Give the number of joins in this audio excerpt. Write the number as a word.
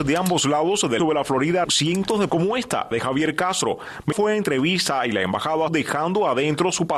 six